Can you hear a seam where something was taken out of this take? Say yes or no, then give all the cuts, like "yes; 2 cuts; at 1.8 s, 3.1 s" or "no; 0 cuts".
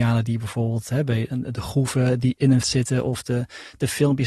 yes; 2 cuts; at 1.3 s, 2.6 s